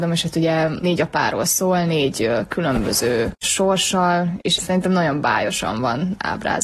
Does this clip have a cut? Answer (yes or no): yes